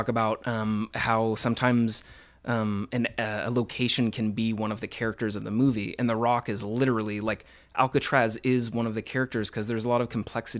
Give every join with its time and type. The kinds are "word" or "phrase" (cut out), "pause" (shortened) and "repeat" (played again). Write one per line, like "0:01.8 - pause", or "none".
none